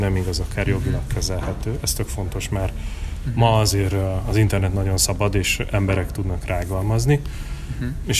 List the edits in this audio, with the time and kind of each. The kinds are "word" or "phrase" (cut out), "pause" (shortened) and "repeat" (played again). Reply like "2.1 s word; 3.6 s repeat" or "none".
none